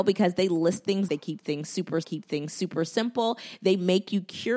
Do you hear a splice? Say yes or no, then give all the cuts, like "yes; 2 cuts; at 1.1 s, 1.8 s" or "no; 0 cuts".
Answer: yes; 2 cuts; at 1.1 s, 2.0 s